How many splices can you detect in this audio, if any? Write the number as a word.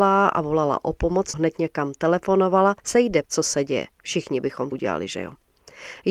four